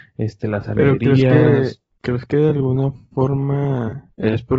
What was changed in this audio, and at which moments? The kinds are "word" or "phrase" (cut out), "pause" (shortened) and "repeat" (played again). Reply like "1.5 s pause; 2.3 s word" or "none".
none